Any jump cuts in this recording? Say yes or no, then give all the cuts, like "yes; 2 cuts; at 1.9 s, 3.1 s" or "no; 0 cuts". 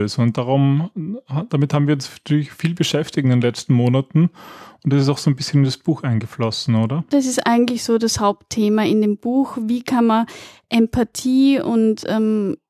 no; 0 cuts